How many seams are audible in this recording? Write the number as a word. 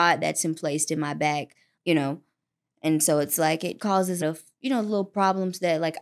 three